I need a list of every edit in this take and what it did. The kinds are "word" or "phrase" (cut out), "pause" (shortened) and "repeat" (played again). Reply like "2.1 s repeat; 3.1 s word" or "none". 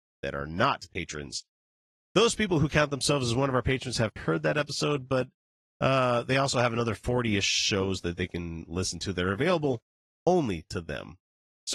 4.2 s word

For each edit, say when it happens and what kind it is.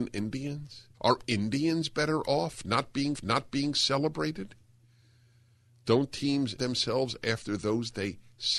0.9 s pause; 3.1 s repeat; 6.6 s word

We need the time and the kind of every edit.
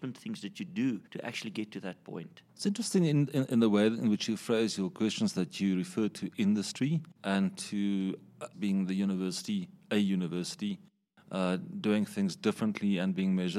1.1 s pause; 7.2 s pause; 8.5 s word

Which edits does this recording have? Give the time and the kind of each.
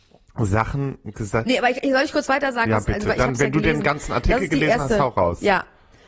none

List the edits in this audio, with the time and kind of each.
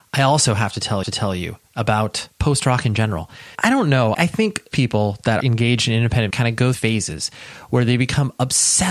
1.0 s repeat; 2.3 s pause; 3.5 s word; 4.1 s word; 4.7 s word; 5.4 s word; 6.3 s word; 6.7 s phrase

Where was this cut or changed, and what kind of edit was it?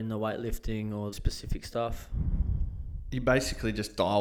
1.1 s phrase

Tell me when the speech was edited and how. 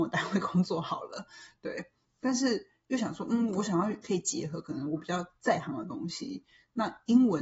none

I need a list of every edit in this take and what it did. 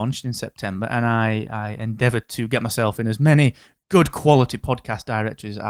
none

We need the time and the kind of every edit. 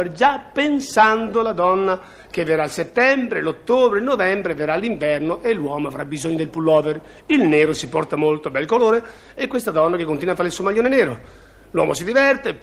none

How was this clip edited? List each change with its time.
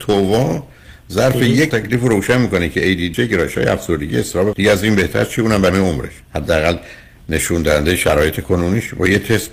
1.7 s word; 3.1 s word; 4.5 s word; 5.7 s word; 6.2 s pause

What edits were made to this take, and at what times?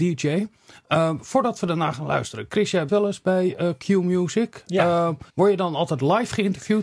2.9 s word; 5.3 s pause

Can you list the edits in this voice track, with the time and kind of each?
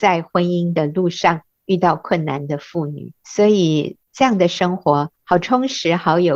3.2 s pause; 4.0 s pause; 5.2 s pause

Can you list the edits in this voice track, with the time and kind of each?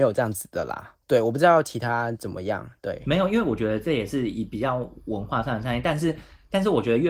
1.0 s pause

